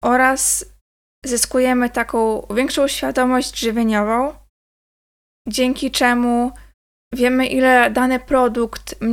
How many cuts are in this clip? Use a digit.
0